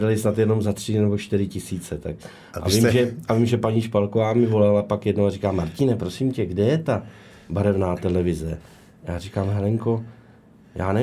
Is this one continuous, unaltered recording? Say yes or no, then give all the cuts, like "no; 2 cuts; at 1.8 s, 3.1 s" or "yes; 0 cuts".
yes; 0 cuts